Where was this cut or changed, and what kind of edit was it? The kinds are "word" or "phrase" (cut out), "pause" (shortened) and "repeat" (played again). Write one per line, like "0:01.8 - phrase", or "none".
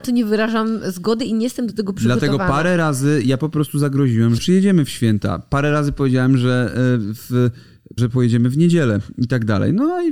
0:04.4 - word
0:08.0 - phrase